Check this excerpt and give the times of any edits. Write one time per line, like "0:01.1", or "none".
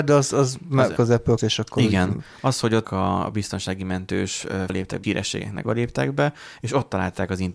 0:01.0
0:01.4
0:02.8
0:04.7
0:05.0
0:05.6